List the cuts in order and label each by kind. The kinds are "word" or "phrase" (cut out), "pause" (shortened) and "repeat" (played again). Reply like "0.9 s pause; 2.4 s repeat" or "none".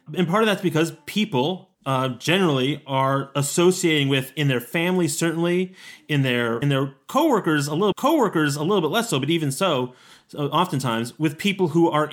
1.7 s pause; 6.6 s phrase; 7.9 s repeat